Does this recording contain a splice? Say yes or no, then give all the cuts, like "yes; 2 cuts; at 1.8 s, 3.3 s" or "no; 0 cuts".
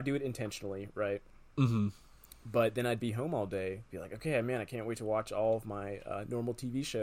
yes; 1 cut; at 3.9 s